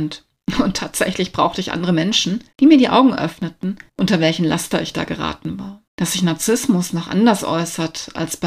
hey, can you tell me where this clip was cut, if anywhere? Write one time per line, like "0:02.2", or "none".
0:02.5
0:03.9
0:05.9